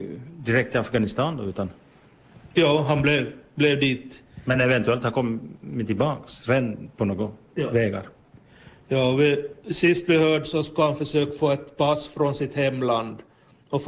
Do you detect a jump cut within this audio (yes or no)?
no